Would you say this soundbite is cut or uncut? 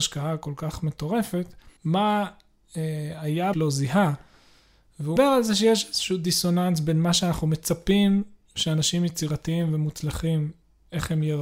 cut